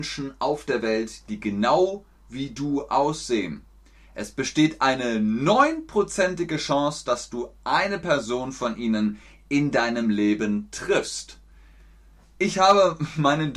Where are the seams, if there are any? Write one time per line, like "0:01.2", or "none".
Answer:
none